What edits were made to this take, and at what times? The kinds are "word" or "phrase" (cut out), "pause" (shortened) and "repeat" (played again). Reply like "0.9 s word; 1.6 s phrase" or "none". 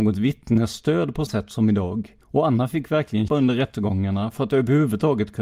1.3 s word; 2.2 s pause; 3.3 s word